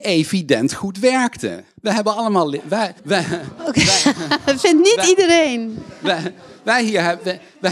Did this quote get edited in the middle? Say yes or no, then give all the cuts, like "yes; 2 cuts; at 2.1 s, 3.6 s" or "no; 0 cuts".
yes; 2 cuts; at 1.7 s, 3.0 s